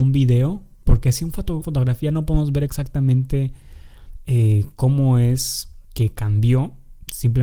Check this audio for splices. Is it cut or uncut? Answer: cut